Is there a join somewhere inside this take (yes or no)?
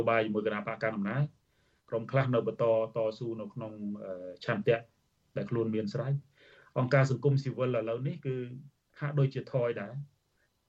no